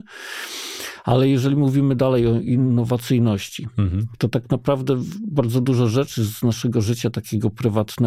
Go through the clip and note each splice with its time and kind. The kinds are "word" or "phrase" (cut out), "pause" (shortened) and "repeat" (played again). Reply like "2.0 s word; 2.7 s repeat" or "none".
none